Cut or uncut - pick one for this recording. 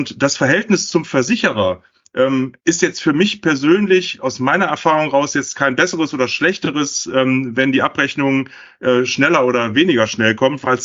cut